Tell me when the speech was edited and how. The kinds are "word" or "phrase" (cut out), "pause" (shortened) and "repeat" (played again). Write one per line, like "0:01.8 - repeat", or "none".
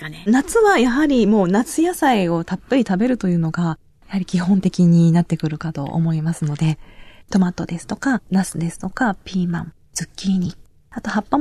none